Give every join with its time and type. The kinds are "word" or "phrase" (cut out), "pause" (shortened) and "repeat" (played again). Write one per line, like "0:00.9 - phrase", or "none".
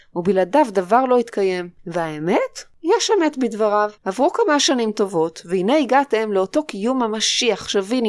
0:01.8 - pause
0:04.0 - pause